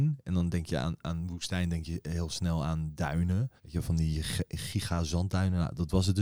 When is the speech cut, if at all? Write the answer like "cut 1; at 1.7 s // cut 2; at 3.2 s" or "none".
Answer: cut 1; at 3.6 s